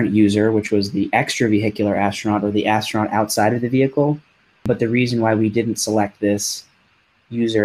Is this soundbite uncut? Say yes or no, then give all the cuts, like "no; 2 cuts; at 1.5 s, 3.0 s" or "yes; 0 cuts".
yes; 0 cuts